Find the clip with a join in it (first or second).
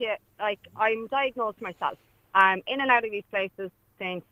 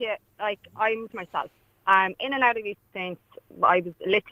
second